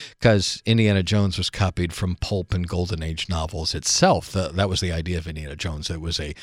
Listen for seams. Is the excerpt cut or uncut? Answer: uncut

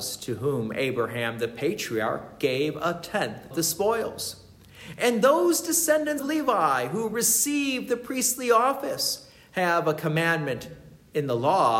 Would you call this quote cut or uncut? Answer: cut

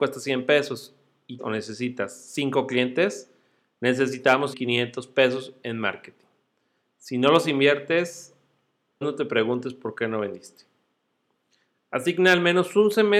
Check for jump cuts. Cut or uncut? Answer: cut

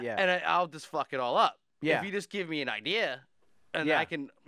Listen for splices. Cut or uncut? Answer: uncut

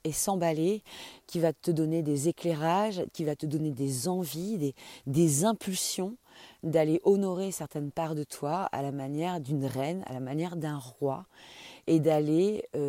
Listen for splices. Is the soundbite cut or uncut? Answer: uncut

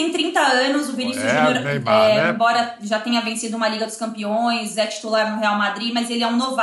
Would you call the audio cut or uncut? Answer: uncut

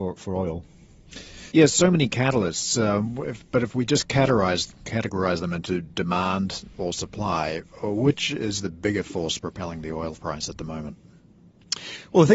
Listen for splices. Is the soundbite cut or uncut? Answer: cut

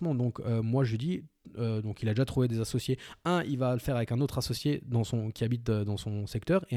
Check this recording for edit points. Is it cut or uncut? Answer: uncut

